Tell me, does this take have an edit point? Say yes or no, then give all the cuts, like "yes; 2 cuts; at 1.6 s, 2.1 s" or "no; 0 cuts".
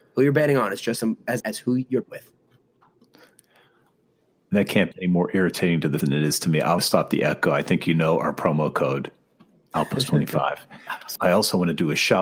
yes; 6 cuts; at 1.4 s, 2.0 s, 4.9 s, 6.0 s, 6.8 s, 11.2 s